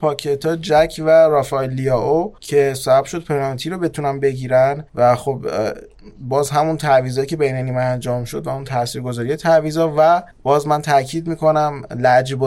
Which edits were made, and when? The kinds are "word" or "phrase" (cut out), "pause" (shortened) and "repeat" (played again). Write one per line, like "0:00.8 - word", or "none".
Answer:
0:02.4 - pause
0:04.9 - pause
0:10.3 - pause